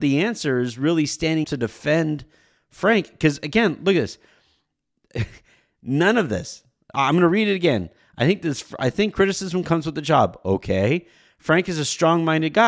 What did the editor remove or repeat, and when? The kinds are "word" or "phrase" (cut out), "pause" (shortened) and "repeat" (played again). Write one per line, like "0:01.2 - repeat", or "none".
0:01.4 - word